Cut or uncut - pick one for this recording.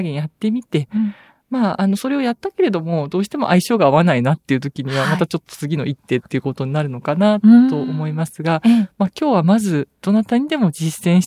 uncut